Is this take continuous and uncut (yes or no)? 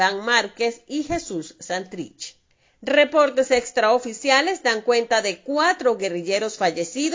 yes